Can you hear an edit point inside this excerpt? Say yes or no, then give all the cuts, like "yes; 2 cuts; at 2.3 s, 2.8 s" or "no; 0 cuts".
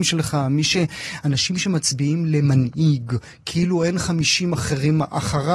no; 0 cuts